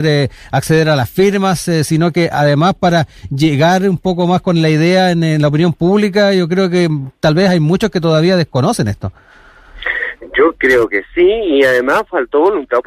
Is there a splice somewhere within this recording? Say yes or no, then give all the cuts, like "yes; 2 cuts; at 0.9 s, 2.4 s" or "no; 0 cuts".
no; 0 cuts